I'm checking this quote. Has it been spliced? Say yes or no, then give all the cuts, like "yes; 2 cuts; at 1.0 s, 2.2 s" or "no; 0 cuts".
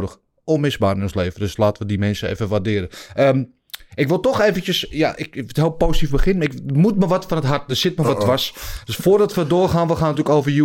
no; 0 cuts